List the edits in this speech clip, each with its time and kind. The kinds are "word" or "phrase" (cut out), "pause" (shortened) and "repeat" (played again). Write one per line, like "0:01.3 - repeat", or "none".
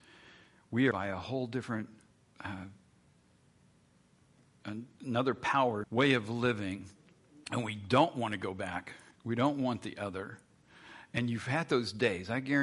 0:00.9 - phrase
0:02.1 - pause
0:05.8 - phrase
0:07.4 - pause
0:09.1 - pause